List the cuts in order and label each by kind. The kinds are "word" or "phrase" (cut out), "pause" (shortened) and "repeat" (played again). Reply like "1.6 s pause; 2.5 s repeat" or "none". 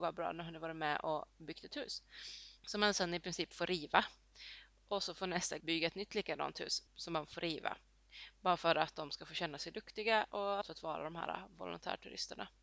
2.6 s pause; 5.6 s word; 6.9 s pause; 10.6 s phrase